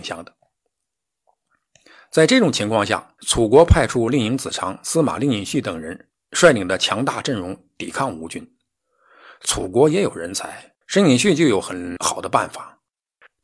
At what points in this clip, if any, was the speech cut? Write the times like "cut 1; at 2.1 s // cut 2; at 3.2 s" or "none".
cut 1; at 3.2 s // cut 2; at 10.8 s